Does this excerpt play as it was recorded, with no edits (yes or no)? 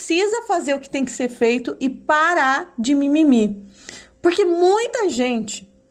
yes